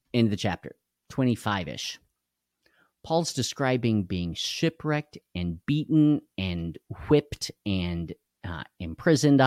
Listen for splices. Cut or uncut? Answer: uncut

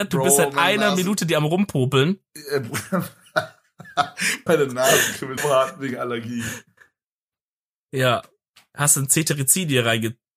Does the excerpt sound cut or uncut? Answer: cut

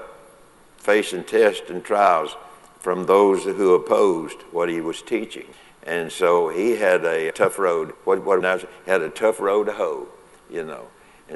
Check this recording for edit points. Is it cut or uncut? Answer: cut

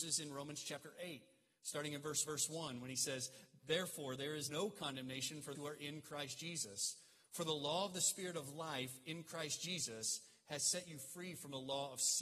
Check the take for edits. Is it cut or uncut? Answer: cut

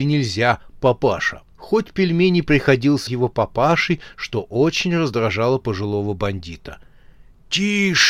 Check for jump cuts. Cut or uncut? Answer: cut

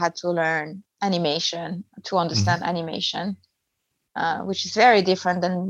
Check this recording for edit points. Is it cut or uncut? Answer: uncut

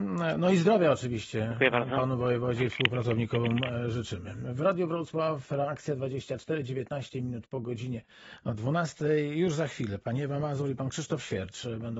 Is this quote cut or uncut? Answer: uncut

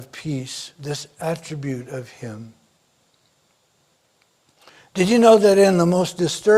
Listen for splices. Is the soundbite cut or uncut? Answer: uncut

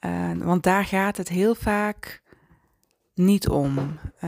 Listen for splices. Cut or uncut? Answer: uncut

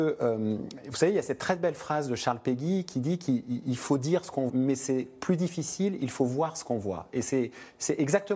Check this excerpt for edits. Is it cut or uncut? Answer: cut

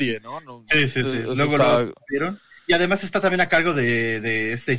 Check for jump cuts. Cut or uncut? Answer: uncut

